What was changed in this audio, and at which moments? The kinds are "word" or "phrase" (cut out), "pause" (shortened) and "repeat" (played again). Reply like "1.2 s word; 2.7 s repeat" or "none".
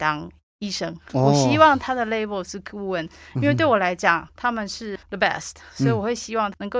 5.0 s pause